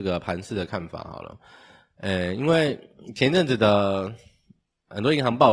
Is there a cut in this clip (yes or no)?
no